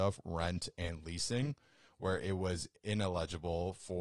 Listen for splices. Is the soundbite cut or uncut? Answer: uncut